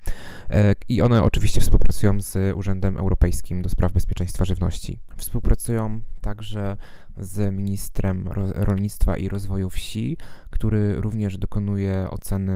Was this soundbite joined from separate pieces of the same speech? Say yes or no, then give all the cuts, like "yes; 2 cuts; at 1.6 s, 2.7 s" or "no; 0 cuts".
no; 0 cuts